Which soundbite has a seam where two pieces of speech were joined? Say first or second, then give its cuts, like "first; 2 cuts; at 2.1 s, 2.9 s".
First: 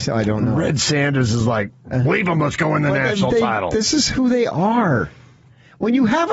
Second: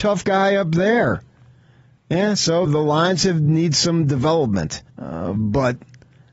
second; 2 cuts; at 2.7 s, 4.9 s